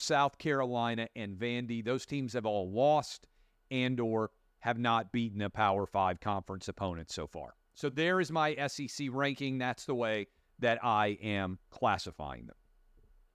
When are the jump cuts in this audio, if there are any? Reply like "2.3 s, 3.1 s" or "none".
none